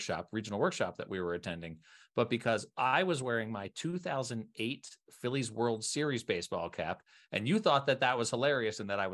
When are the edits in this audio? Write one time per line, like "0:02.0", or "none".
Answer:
none

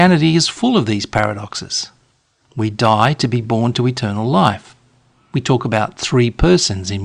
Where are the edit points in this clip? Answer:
none

